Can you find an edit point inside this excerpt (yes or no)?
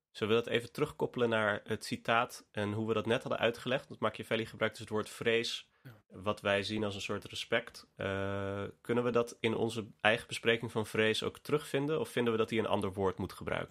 no